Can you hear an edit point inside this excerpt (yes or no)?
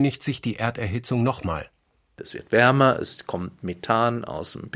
no